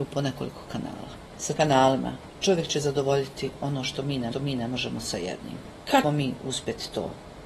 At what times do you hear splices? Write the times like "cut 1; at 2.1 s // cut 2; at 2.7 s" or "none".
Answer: cut 1; at 1.6 s // cut 2; at 4.3 s // cut 3; at 6.0 s